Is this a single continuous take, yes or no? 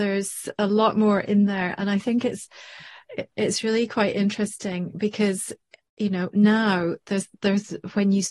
yes